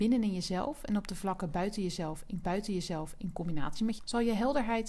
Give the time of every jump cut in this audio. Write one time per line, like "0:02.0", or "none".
0:02.4
0:04.0